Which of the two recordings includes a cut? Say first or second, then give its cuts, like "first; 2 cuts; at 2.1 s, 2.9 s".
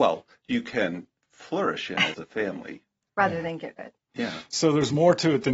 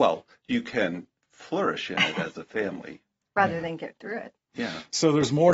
first; 2 cuts; at 2.1 s, 3.8 s